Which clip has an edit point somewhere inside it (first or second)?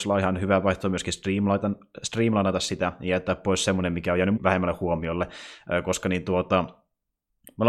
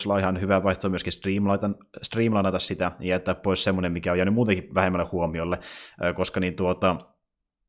first